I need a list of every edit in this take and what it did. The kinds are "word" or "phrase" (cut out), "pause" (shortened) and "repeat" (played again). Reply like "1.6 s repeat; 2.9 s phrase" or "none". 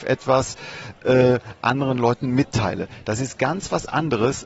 none